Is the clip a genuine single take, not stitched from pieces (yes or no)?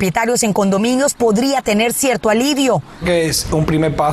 yes